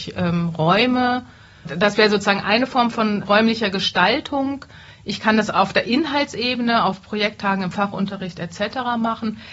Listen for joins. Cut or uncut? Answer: cut